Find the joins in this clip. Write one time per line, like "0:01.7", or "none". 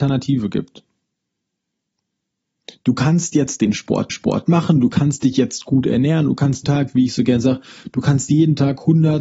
0:04.1
0:06.6

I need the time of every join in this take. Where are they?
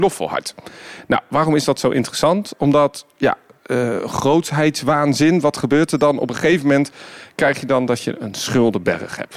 none

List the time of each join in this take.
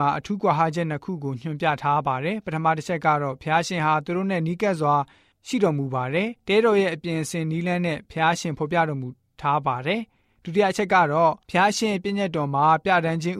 0:06.4
0:11.4

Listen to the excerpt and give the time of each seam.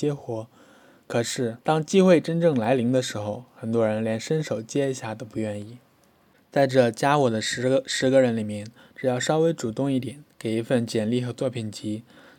0:01.6

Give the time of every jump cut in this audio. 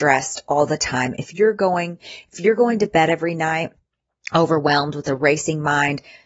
none

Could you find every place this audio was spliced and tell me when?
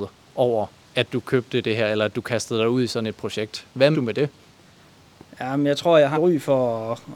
0:03.9
0:06.1

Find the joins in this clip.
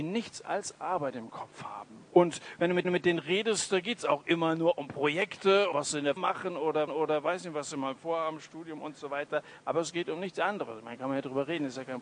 0:02.1
0:02.8
0:05.7
0:06.2
0:06.9

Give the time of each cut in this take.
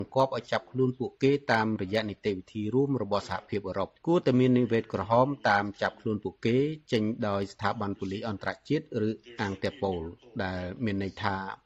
0:04.0

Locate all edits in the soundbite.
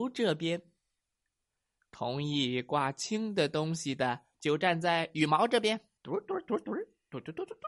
0:04.3
0:06.0

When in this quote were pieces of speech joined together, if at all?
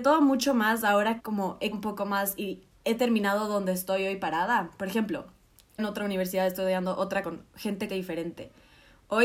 0:01.2
0:01.7
0:02.7
0:05.8
0:07.2
0:07.9

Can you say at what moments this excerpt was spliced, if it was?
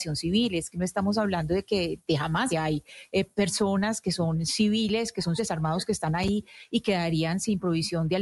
0:02.0
0:02.5
0:05.4

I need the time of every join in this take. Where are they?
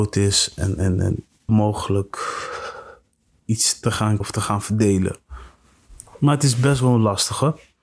0:01.5
0:04.2

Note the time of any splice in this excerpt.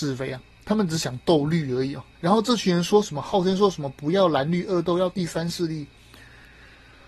0:02.1

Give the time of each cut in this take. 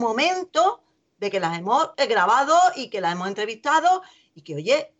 none

